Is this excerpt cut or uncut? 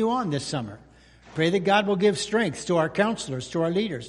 uncut